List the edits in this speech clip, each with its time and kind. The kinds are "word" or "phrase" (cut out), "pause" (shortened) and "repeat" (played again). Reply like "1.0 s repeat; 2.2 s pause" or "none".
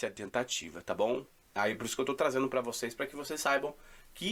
none